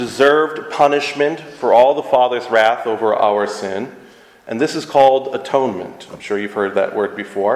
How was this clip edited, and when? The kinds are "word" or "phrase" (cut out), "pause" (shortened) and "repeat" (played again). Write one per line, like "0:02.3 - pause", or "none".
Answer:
none